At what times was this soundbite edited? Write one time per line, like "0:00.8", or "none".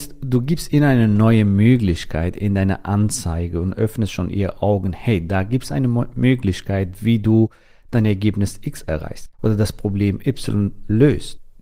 0:09.3